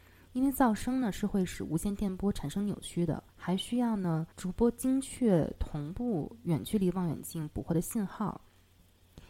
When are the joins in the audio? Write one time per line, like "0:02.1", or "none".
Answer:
0:03.3
0:04.3